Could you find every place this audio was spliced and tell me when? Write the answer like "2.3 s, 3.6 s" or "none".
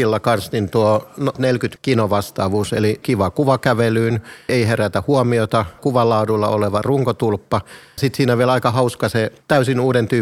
1.3 s, 1.8 s, 3.0 s, 4.5 s, 5.8 s, 8.0 s